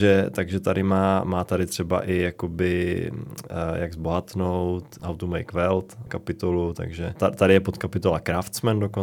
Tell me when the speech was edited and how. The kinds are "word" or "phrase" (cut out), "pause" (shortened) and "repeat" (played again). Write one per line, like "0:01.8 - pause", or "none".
0:05.0 - word
0:06.1 - word
0:07.2 - word

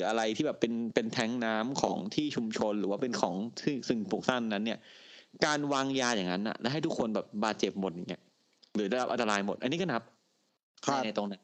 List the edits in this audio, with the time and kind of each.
none

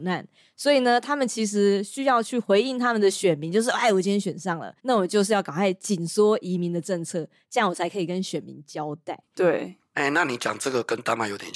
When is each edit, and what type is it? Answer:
0:04.8 - pause

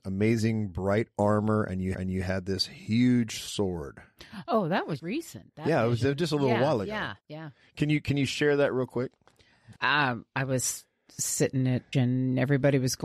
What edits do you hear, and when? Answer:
0:01.9 - repeat
0:05.0 - word
0:07.2 - pause
0:09.8 - pause
0:11.9 - word

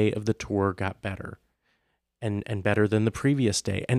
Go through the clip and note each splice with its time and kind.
none

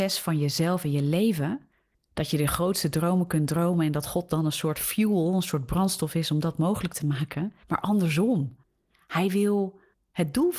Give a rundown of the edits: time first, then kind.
0:07.6 - pause

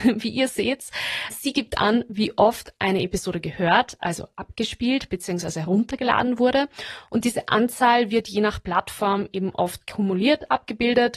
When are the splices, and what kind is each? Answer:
none

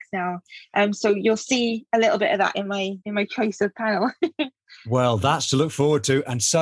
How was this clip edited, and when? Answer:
0:03.0 - pause

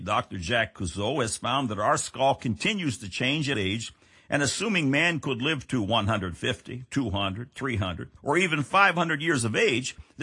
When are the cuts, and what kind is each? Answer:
0:03.5 - phrase
0:08.2 - pause

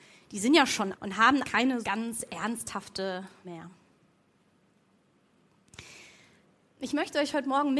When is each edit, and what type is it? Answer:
0:00.9 - word
0:01.4 - word
0:01.8 - word
0:03.4 - word

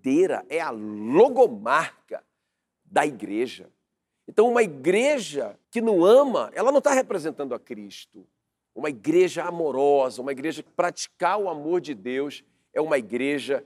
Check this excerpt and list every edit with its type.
0:05.6 - pause
0:10.7 - word

